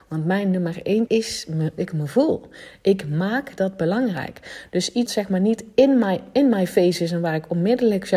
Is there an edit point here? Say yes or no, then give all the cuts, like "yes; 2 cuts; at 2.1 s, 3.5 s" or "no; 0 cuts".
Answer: yes; 3 cuts; at 1.1 s, 1.8 s, 5.1 s